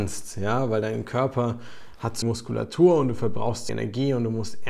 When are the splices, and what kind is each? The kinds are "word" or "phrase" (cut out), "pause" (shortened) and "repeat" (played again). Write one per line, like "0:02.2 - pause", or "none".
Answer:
0:02.2 - word
0:03.7 - word